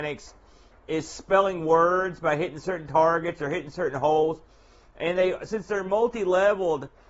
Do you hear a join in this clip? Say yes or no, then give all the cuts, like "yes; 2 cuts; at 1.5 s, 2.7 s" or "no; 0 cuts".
no; 0 cuts